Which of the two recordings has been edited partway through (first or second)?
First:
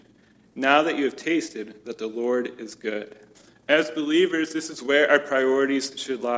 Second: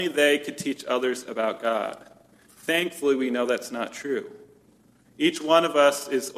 first